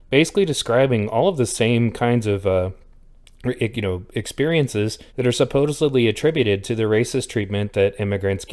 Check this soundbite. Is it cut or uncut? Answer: cut